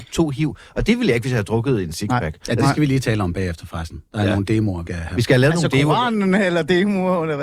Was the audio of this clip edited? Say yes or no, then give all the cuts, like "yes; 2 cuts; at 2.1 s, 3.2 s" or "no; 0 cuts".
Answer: yes; 1 cut; at 4.9 s